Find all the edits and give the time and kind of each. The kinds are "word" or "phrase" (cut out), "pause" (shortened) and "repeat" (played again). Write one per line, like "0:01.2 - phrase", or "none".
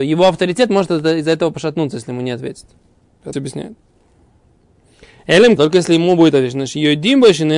0:03.3 - phrase
0:05.6 - word